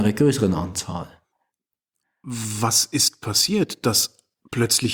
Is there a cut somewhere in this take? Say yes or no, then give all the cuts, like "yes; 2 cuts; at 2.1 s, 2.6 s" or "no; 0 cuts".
no; 0 cuts